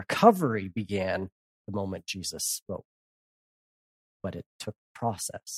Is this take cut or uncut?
uncut